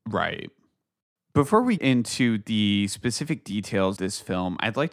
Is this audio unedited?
no; 2 cuts; at 1.8 s, 4.0 s

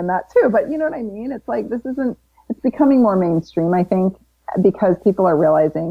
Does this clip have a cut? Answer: no; 0 cuts

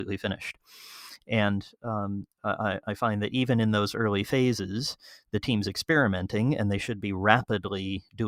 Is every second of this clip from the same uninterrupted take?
yes; 0 cuts

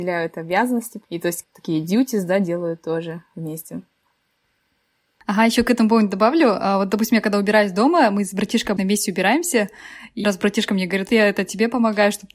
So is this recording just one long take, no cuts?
no; 5 cuts; at 1.0 s, 1.4 s, 8.8 s, 10.2 s, 11.1 s

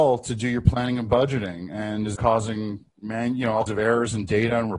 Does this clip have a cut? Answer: yes; 3 cuts; at 2.2 s, 2.9 s, 3.7 s

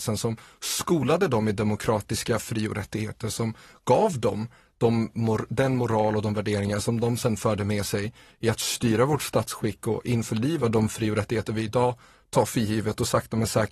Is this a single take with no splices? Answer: yes; 0 cuts

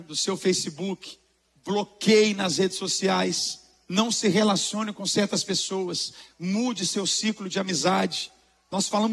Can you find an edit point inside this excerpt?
no; 0 cuts

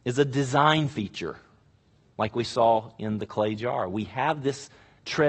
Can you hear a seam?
no; 0 cuts

